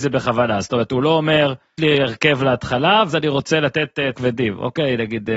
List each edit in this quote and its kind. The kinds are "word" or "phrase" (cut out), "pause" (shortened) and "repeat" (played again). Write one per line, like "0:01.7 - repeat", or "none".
0:01.8 - word
0:03.1 - word
0:04.1 - word